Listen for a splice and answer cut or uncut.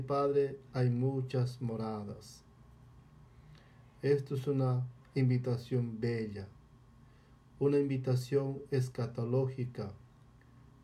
uncut